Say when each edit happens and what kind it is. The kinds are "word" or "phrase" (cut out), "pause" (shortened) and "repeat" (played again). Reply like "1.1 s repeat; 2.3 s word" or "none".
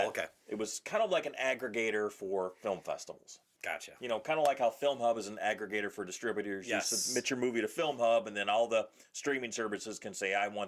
none